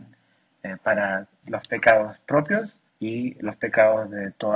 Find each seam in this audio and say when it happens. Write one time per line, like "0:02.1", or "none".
0:01.4
0:02.9